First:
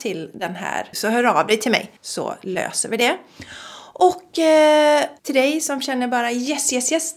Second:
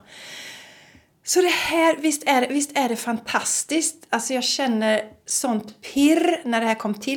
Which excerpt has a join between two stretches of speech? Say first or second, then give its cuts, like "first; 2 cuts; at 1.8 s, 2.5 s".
first; 3 cuts; at 0.9 s, 2.0 s, 5.2 s